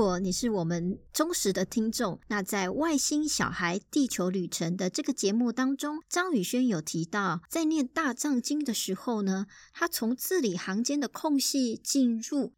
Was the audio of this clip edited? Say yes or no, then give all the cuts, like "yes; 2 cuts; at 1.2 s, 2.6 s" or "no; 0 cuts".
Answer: no; 0 cuts